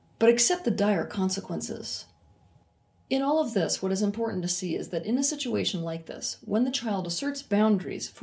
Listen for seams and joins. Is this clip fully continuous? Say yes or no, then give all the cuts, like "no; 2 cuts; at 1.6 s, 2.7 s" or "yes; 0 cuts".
yes; 0 cuts